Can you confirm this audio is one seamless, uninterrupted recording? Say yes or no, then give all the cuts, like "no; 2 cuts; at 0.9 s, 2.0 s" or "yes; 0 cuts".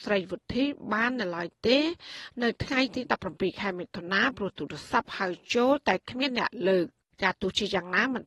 no; 1 cut; at 7.1 s